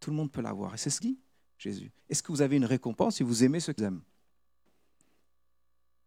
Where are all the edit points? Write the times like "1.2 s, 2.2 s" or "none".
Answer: 1.0 s, 2.0 s, 3.8 s

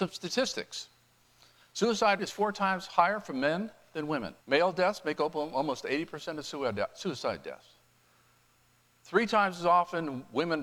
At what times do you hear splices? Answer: 2.2 s, 4.4 s

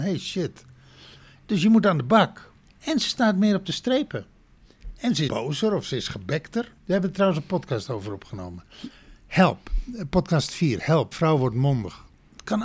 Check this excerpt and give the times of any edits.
5.3 s, 6.8 s, 11.1 s

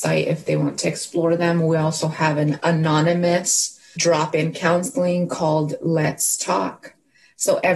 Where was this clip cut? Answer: 4.0 s

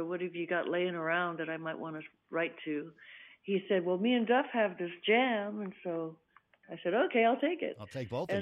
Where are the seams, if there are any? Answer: none

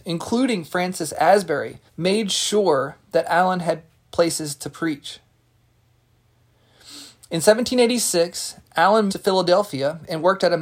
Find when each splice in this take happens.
1.9 s, 9.1 s

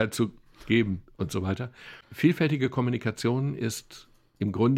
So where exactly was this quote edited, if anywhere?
2.0 s

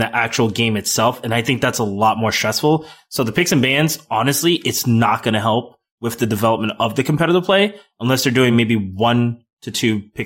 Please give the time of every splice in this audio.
none

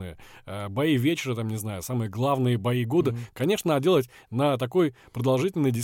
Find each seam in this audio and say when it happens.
none

